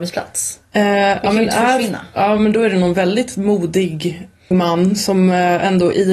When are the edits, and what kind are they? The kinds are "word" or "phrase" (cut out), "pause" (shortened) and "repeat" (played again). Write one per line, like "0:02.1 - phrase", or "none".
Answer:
0:04.5 - word